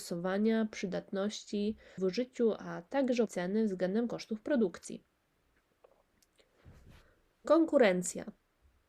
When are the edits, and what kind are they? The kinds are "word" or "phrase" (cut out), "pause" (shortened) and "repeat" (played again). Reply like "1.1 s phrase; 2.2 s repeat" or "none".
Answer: 2.0 s word; 3.3 s word